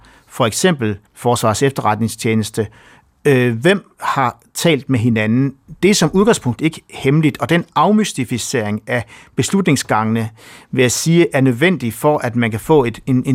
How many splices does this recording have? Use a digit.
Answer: 1